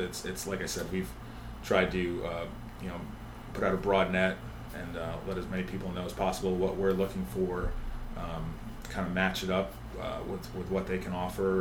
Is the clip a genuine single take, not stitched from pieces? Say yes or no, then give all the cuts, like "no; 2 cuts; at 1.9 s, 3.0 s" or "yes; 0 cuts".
yes; 0 cuts